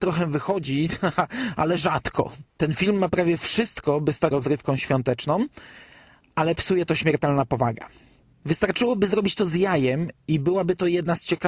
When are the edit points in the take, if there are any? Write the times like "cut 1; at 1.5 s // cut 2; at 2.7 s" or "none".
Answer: cut 1; at 2.5 s // cut 2; at 4.3 s